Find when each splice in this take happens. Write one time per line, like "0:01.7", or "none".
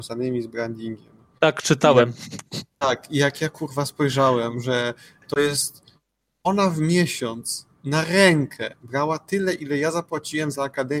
none